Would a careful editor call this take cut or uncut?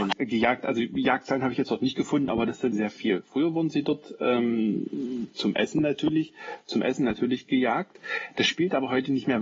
cut